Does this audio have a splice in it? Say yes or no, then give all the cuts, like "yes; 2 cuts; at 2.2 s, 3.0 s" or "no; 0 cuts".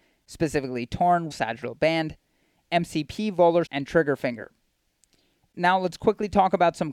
yes; 2 cuts; at 1.3 s, 3.7 s